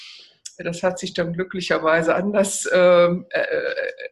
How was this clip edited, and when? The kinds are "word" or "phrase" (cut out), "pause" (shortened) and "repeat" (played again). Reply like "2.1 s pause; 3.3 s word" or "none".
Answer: none